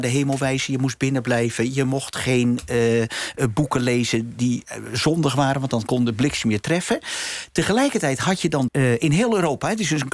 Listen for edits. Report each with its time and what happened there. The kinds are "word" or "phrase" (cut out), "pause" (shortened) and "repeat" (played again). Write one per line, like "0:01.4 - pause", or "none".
0:08.7 - phrase